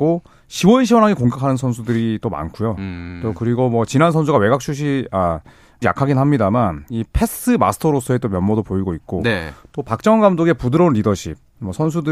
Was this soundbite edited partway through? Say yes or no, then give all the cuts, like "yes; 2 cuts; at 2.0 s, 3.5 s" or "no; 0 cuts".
yes; 2 cuts; at 5.8 s, 6.9 s